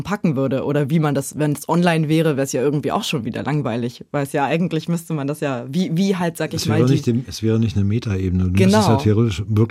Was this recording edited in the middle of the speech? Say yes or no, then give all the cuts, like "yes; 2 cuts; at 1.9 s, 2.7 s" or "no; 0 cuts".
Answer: no; 0 cuts